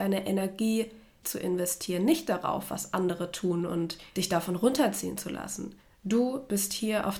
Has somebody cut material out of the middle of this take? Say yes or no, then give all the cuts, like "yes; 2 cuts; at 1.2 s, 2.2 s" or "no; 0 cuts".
yes; 2 cuts; at 1.2 s, 4.1 s